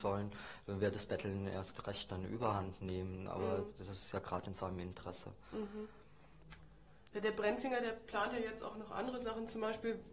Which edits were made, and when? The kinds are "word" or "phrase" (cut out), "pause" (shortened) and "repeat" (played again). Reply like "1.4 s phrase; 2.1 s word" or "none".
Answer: none